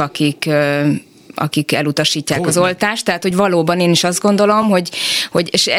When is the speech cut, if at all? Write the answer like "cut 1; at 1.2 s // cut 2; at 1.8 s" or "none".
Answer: none